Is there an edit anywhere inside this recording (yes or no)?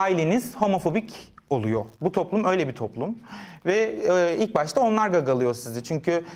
yes